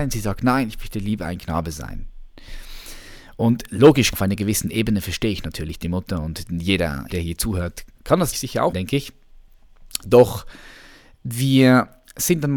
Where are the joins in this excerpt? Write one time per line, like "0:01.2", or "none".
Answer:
0:04.1
0:07.1
0:07.9
0:08.3
0:08.7